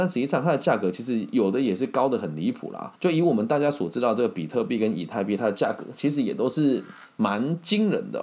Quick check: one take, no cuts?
no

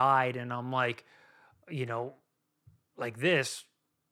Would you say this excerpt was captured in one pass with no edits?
yes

